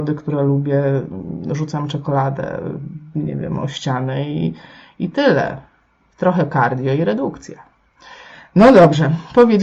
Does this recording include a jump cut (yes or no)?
no